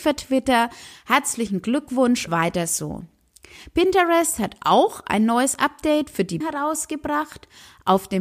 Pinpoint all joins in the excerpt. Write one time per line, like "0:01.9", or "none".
0:02.3
0:06.4